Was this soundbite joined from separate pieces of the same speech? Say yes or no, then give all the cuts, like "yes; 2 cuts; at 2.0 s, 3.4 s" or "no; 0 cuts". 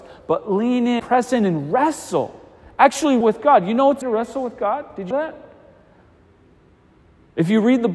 yes; 4 cuts; at 1.0 s, 3.2 s, 4.0 s, 5.1 s